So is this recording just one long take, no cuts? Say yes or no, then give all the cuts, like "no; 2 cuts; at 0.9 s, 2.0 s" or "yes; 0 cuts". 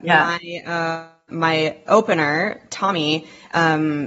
no; 1 cut; at 1.3 s